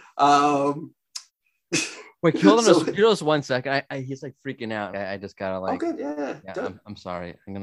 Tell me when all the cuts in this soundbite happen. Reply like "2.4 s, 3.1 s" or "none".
1.3 s, 4.9 s